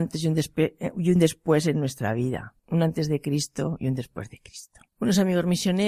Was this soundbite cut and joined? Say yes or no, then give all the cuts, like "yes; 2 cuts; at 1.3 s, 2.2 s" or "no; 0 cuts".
yes; 1 cut; at 2.6 s